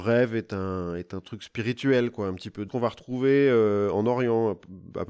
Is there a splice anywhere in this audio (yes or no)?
yes